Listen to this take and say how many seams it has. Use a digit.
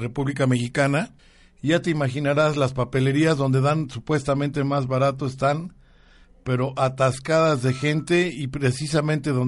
0